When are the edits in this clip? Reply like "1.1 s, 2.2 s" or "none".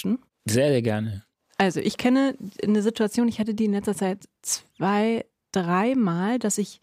none